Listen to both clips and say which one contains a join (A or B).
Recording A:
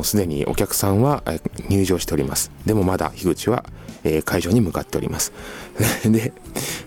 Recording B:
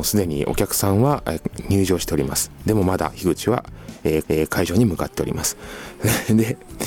B